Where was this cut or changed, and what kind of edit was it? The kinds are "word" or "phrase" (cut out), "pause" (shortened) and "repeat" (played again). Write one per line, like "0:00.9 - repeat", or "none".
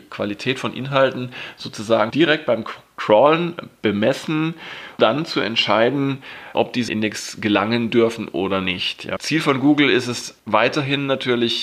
0:02.1 - word
0:05.0 - word
0:06.5 - word
0:06.9 - phrase
0:09.2 - word
0:10.4 - pause

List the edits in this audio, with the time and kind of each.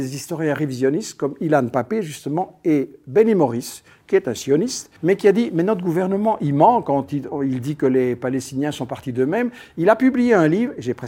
0:05.0 - pause

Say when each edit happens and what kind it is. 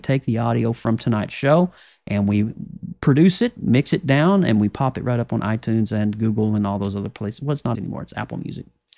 0:07.7 - word

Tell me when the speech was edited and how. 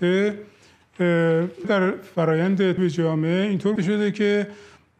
0:01.6 - word
0:02.8 - word
0:03.8 - word

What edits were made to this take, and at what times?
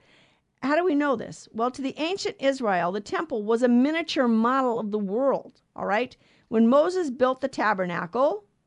none

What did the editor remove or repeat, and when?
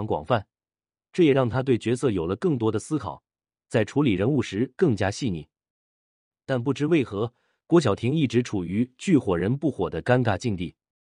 none

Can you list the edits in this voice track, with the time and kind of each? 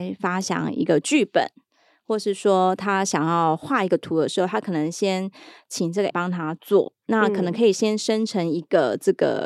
0:06.1 - word

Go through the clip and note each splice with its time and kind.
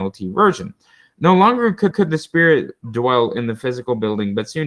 0:01.9 - repeat

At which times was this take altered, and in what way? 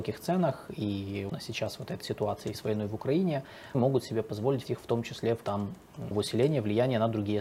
0:01.3 - word
0:02.0 - word
0:02.5 - word
0:03.7 - word
0:04.6 - word
0:05.4 - word
0:06.1 - word

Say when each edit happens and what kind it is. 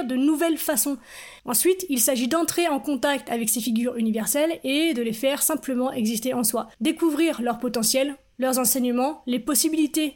0:01.4 - pause

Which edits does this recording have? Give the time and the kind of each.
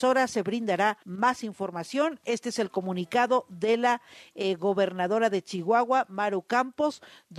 0:01.0 - pause

